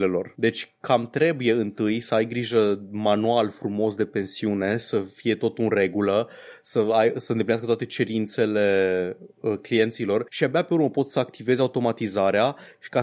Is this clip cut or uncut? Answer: cut